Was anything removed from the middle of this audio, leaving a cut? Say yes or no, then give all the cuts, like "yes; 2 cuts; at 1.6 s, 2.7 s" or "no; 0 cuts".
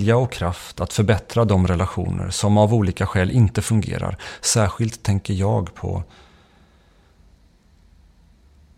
no; 0 cuts